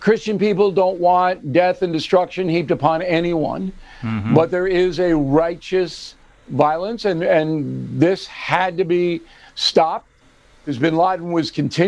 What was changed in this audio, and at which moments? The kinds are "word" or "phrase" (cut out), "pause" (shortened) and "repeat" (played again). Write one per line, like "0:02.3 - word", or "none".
none